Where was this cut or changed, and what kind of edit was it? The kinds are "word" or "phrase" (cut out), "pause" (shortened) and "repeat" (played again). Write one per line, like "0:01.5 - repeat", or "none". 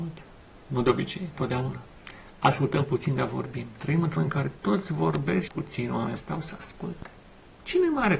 0:01.4 - word
0:04.2 - word
0:05.5 - word
0:06.2 - word